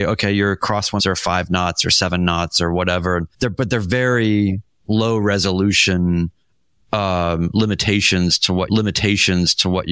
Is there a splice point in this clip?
yes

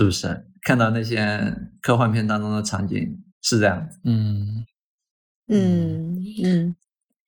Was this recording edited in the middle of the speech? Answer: yes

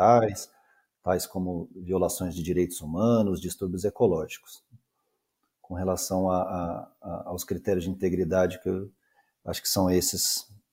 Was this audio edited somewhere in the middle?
no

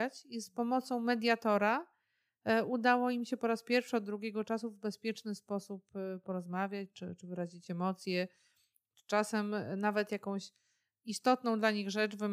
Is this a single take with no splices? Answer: yes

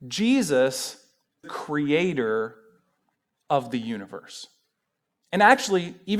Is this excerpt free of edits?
no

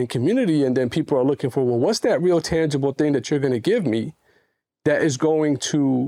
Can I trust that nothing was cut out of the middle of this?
yes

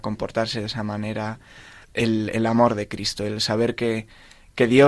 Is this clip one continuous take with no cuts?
no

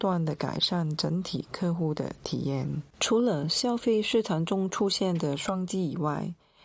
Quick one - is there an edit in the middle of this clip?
yes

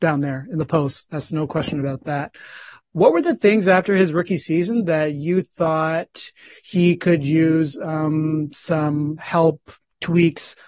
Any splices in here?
no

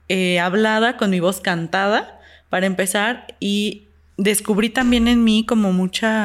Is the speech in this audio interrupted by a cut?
no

